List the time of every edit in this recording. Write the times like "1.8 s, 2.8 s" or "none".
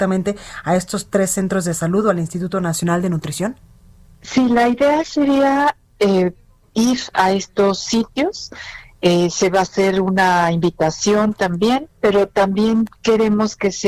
none